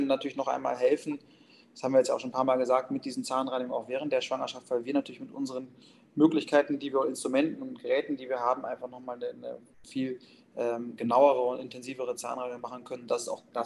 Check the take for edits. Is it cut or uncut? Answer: uncut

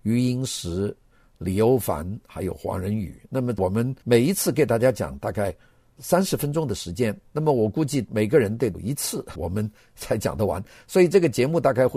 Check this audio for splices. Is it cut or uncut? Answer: cut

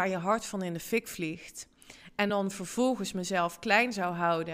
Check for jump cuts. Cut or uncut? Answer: uncut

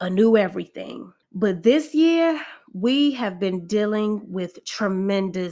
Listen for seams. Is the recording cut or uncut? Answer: cut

